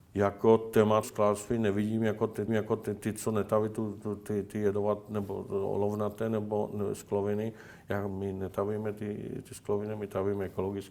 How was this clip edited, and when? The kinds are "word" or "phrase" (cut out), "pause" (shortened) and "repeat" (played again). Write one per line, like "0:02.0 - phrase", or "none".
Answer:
0:01.0 - phrase
0:02.5 - repeat
0:08.1 - word